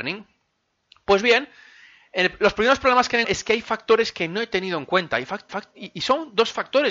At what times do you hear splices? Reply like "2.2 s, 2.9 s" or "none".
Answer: 3.2 s, 5.5 s